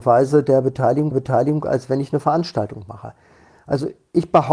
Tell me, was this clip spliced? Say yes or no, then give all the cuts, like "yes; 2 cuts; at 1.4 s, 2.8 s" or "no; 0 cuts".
yes; 1 cut; at 1.1 s